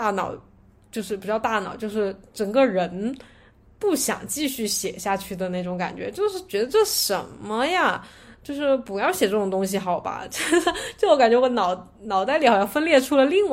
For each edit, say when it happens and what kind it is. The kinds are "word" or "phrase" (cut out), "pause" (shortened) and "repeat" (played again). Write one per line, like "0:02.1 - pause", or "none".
none